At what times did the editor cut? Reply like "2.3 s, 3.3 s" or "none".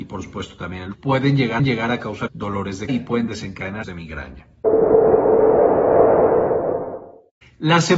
0.9 s, 1.6 s, 2.3 s, 2.9 s, 3.8 s

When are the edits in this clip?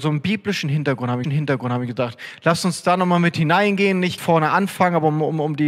1.2 s, 4.2 s

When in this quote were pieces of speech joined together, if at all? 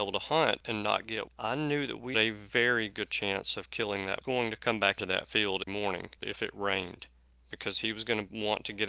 1.3 s, 2.1 s, 4.2 s, 5.0 s, 5.7 s

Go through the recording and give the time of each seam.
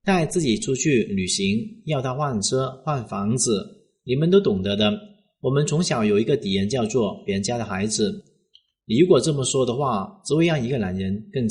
none

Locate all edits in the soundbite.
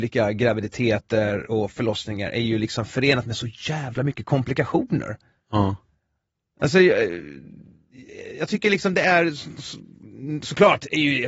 none

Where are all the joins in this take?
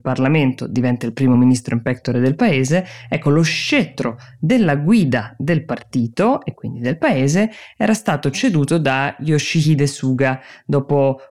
none

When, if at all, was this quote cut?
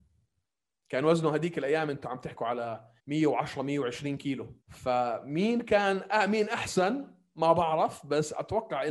3.0 s, 4.6 s

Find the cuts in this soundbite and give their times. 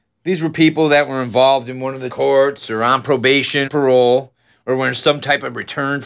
2.1 s, 3.7 s

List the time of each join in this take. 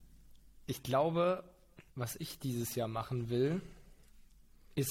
1.9 s

